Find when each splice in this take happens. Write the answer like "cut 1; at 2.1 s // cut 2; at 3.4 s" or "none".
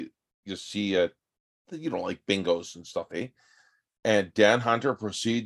cut 1; at 3.1 s